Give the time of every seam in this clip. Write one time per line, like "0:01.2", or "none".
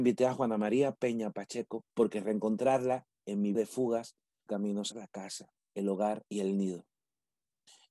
0:01.9
0:03.5
0:04.5
0:04.9
0:05.6
0:06.3